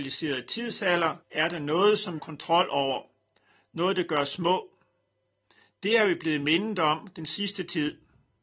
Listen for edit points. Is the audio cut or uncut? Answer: cut